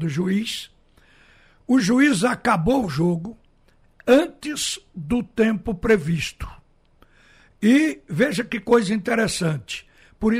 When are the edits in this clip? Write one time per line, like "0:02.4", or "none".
none